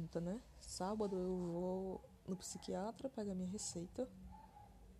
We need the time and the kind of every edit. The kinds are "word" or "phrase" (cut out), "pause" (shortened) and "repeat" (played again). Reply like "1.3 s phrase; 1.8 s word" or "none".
none